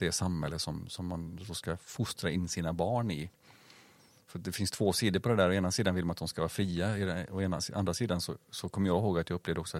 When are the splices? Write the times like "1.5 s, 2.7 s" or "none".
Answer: none